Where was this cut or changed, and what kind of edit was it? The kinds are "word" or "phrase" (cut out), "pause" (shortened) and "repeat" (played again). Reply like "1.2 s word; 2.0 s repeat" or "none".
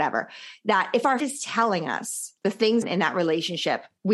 1.2 s word; 2.4 s pause; 2.8 s phrase

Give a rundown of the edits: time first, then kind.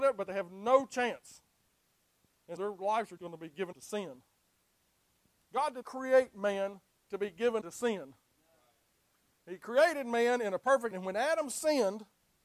2.6 s word; 3.2 s word; 3.7 s word; 5.8 s word; 7.6 s word; 10.9 s word

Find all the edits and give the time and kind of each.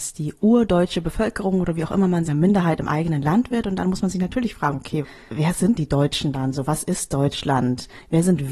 2.3 s phrase; 5.8 s word

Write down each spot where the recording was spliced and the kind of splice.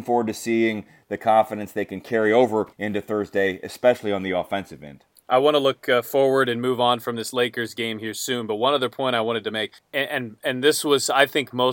2.7 s pause; 5.1 s pause; 9.8 s pause

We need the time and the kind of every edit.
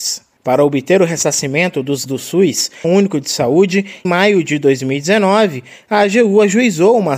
2.1 s word; 2.8 s word; 4.0 s word

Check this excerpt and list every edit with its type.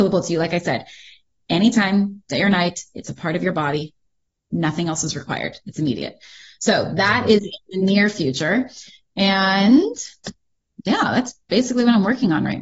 none

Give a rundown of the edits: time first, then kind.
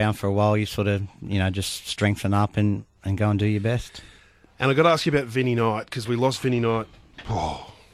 1.1 s pause

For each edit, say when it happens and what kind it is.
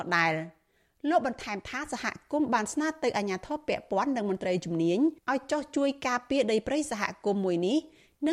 5.2 s pause

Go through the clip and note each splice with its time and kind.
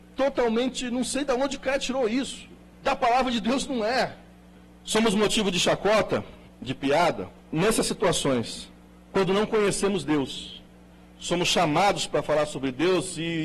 none

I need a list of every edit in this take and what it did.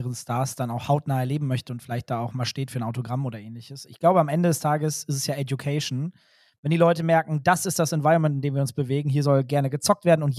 none

